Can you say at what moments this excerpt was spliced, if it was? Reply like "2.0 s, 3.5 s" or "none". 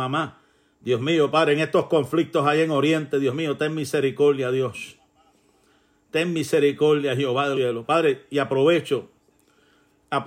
7.5 s